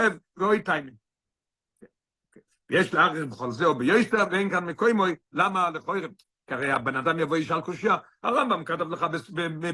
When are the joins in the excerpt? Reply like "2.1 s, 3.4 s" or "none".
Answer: none